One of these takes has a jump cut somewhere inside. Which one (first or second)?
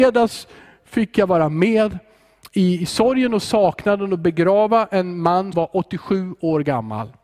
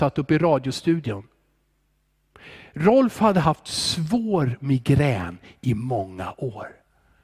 first